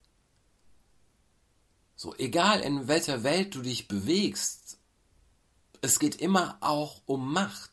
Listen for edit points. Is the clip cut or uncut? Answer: uncut